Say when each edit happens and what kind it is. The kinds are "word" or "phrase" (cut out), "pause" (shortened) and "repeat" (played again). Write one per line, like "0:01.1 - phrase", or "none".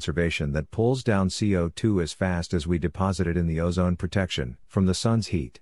0:04.6 - pause